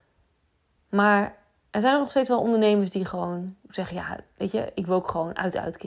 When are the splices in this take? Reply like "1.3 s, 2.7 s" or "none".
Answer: none